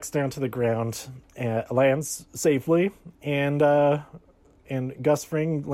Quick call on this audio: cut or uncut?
uncut